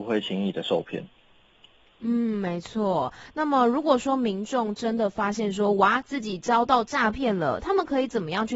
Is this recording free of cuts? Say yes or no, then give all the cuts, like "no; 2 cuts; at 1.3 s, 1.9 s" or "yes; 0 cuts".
yes; 0 cuts